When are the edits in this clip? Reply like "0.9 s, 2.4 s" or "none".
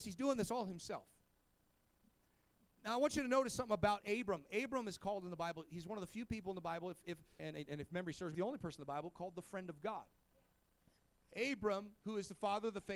7.4 s, 8.3 s